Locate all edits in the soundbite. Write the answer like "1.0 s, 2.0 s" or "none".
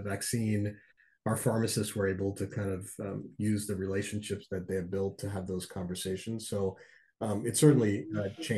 none